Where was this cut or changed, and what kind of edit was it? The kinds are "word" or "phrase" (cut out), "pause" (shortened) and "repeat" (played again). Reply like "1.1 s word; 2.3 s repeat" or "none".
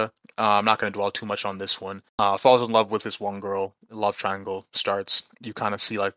2.1 s pause